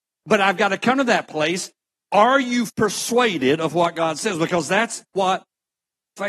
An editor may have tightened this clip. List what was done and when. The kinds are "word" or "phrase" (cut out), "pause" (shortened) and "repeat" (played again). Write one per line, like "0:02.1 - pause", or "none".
0:02.7 - word